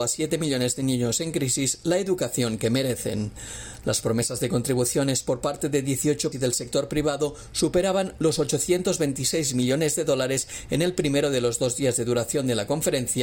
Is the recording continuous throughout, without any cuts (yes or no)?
no